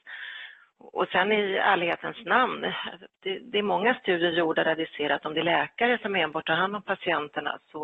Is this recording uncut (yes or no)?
yes